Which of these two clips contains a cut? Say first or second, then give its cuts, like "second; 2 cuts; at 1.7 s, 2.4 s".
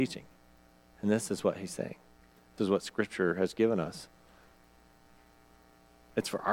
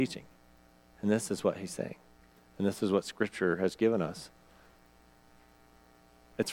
first; 1 cut; at 2.6 s